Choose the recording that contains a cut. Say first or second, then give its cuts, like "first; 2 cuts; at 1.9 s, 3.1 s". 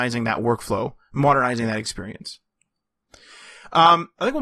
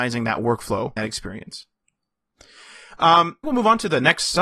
second; 2 cuts; at 1.0 s, 3.4 s